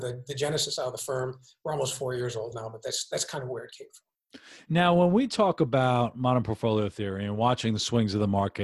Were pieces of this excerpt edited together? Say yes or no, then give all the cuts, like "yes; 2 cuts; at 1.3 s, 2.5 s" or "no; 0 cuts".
no; 0 cuts